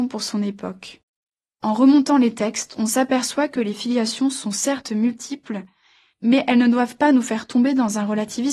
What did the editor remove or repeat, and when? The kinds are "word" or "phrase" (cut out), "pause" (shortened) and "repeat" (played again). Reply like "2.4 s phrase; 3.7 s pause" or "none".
none